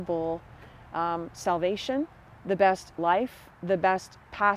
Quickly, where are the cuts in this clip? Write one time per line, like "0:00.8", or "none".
0:02.1
0:03.0
0:03.6